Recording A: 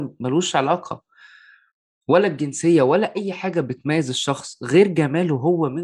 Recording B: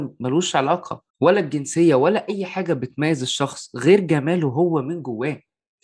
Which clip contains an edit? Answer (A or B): B